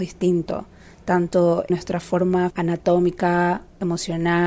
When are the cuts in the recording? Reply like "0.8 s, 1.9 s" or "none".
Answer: 1.7 s, 2.5 s